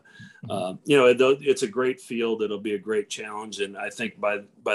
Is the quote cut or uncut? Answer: uncut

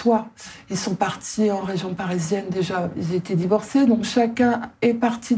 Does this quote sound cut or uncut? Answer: uncut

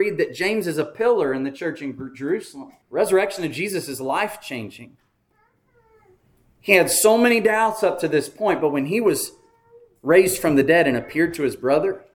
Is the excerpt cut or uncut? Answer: cut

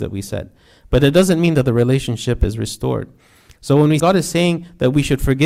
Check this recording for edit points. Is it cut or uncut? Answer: cut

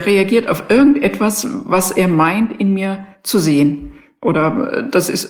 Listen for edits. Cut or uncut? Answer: uncut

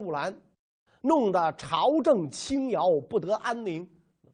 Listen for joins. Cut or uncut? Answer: uncut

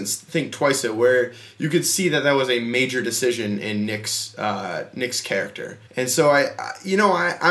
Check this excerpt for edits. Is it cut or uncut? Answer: cut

